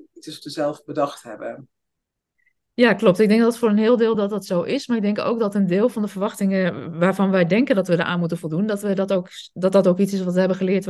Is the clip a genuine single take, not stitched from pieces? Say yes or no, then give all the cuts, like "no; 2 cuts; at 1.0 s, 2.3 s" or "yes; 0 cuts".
yes; 0 cuts